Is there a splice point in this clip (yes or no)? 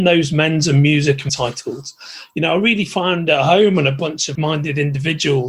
yes